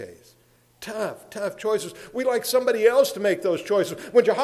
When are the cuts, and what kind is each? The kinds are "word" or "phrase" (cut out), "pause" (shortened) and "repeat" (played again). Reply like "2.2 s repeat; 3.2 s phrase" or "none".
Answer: none